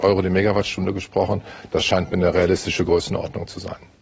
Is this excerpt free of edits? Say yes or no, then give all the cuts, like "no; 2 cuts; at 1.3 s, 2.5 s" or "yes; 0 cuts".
yes; 0 cuts